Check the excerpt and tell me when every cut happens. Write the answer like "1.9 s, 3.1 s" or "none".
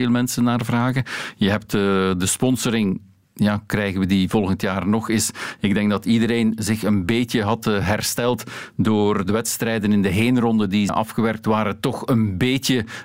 10.9 s